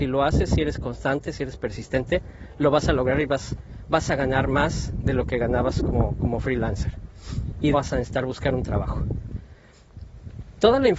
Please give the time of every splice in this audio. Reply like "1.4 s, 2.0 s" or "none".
7.7 s